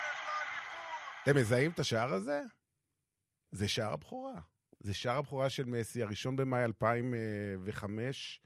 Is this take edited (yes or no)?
no